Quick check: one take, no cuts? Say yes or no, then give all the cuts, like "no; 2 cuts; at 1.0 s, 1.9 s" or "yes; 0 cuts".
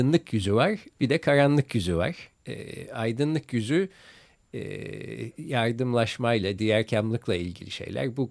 yes; 0 cuts